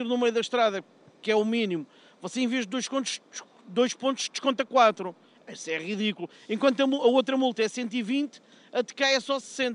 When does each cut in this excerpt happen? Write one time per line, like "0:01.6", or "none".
none